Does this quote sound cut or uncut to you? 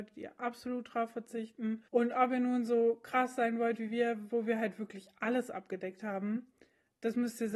cut